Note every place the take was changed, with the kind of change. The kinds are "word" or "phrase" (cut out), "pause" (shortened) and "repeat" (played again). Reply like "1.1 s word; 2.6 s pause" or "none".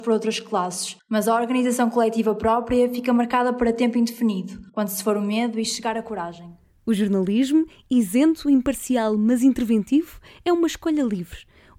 4.7 s pause